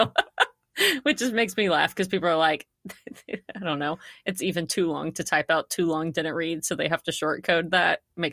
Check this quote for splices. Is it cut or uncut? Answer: cut